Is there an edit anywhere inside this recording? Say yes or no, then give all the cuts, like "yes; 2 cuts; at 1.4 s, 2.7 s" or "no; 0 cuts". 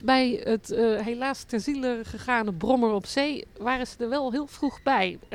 no; 0 cuts